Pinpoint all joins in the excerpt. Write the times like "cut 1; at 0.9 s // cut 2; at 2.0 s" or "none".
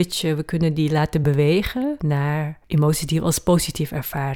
none